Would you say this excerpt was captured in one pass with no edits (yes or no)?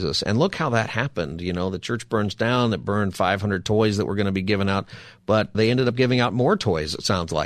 no